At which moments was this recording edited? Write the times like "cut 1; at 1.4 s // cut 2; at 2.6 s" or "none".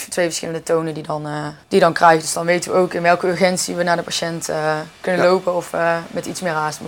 cut 1; at 1.6 s